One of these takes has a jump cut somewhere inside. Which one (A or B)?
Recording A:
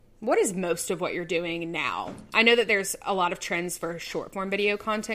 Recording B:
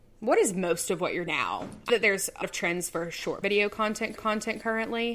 B